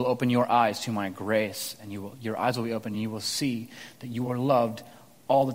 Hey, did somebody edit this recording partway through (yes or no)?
no